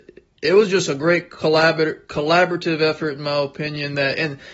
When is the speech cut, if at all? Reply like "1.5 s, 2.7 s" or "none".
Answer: none